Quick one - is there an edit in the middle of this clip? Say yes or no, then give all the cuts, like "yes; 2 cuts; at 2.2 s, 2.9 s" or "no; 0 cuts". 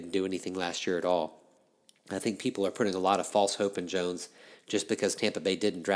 no; 0 cuts